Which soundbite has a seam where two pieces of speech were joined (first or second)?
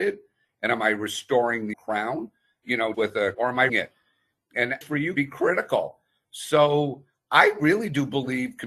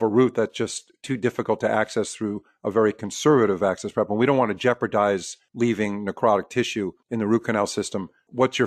first